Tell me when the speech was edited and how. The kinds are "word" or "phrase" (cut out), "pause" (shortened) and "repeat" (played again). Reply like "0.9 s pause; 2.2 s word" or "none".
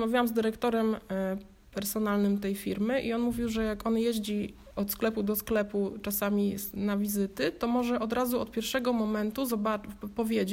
none